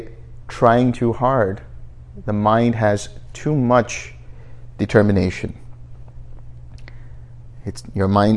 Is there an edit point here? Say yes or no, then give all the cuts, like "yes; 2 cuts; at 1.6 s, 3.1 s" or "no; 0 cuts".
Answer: no; 0 cuts